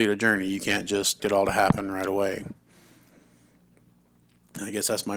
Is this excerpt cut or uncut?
cut